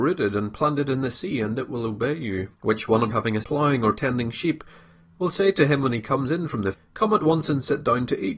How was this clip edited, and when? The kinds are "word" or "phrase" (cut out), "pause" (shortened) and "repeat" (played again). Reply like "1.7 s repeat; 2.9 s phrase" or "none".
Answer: 2.5 s pause; 3.1 s word; 3.4 s word; 6.7 s word